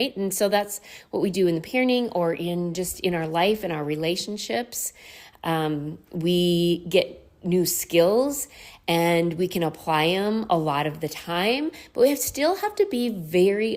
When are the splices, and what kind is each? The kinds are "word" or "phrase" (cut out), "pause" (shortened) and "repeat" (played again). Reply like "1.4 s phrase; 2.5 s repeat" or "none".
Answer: none